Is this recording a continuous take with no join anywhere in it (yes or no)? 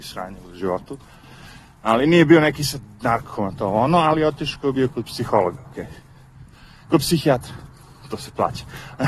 yes